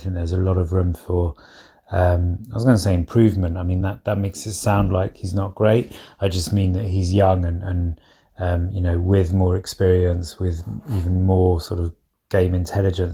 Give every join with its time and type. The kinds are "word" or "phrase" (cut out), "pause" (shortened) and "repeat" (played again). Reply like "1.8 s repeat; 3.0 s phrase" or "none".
none